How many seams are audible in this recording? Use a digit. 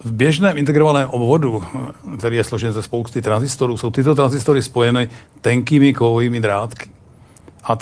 0